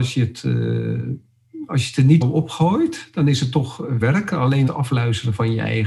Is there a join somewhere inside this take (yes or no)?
yes